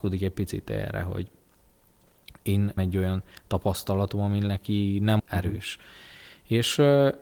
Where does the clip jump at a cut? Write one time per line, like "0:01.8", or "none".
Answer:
0:02.8
0:05.2